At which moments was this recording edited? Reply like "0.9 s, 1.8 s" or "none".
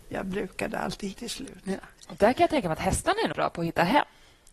1.1 s, 3.3 s